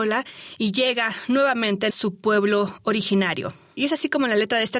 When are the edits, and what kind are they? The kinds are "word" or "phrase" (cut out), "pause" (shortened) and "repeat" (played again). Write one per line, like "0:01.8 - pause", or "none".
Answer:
0:01.9 - phrase